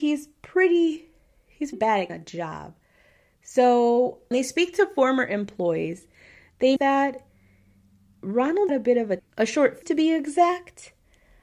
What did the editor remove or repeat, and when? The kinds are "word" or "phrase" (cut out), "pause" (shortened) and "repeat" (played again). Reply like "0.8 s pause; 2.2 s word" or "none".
1.7 s word; 2.1 s word; 4.3 s word; 6.8 s word; 8.7 s word; 9.2 s word; 9.8 s word